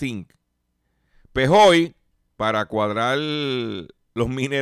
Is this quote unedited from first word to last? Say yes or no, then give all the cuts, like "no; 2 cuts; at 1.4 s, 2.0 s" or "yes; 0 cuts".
yes; 0 cuts